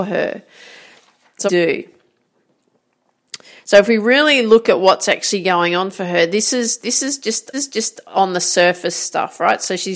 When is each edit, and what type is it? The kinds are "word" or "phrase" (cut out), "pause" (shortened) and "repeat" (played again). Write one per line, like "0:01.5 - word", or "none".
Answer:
0:01.5 - phrase
0:07.5 - repeat